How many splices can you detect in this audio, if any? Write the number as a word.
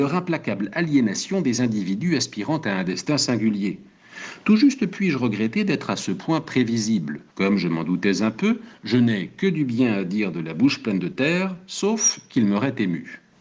one